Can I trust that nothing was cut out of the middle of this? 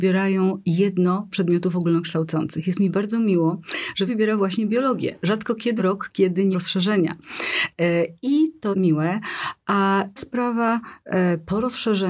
no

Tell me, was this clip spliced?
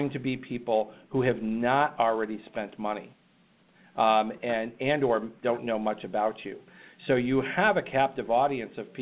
no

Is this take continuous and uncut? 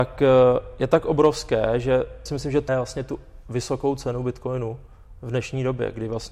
no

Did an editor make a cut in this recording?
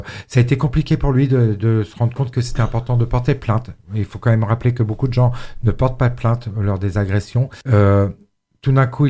yes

